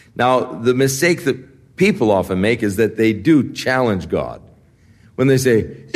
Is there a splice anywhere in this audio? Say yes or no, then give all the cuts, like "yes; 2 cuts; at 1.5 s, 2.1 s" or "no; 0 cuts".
no; 0 cuts